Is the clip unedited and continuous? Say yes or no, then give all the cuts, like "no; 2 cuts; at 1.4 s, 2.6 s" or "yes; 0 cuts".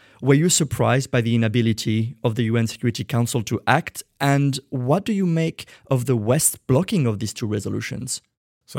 yes; 0 cuts